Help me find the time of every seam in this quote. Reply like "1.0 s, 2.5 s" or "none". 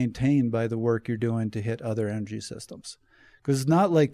none

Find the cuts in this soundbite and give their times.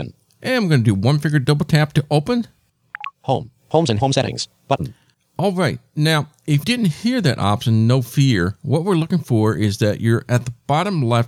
3.1 s, 6.6 s

